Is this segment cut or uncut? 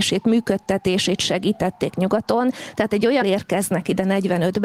cut